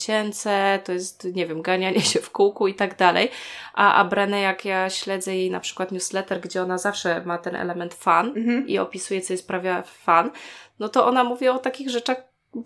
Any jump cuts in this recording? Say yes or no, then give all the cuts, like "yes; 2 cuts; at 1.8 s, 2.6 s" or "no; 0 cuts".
no; 0 cuts